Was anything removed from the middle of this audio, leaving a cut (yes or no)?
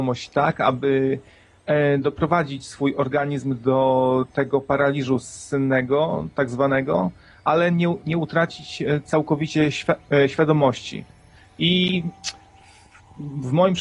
no